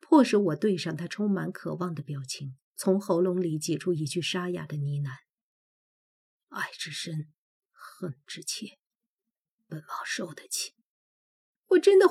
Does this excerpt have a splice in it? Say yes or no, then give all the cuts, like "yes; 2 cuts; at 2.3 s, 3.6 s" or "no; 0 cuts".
yes; 1 cut; at 2.6 s